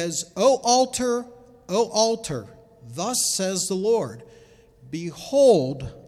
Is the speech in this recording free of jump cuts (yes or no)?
yes